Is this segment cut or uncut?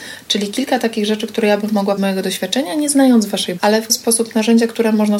cut